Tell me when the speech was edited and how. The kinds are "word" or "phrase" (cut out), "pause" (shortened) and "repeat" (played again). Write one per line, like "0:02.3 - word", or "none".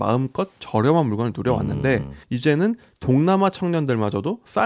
0:02.2 - pause